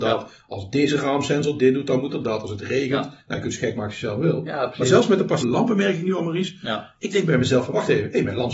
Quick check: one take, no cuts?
no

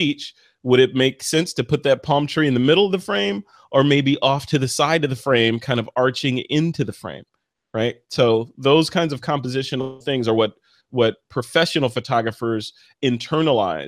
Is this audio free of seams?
yes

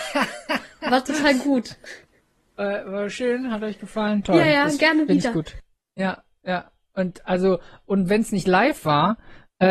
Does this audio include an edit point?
no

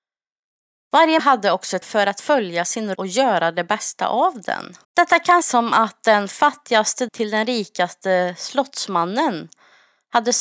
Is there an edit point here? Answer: yes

